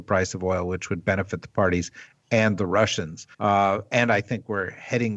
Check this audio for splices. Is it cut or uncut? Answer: cut